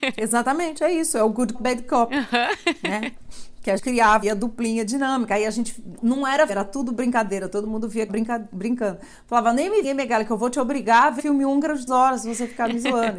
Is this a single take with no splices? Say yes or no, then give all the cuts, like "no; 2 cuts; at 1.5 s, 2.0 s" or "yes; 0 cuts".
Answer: no; 9 cuts; at 1.5 s, 3.8 s, 4.2 s, 6.0 s, 6.5 s, 8.1 s, 9.8 s, 11.2 s, 11.9 s